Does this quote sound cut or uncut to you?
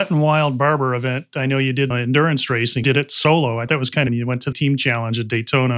cut